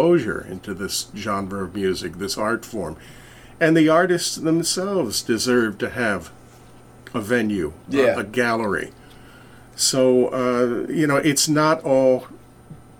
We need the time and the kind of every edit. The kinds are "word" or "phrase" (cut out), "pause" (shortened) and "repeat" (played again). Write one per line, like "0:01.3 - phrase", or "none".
none